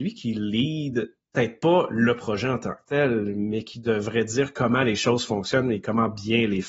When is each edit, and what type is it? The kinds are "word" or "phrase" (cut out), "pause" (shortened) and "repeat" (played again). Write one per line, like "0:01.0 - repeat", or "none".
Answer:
0:01.2 - pause